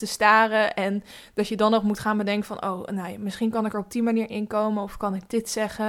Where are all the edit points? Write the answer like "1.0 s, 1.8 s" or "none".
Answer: none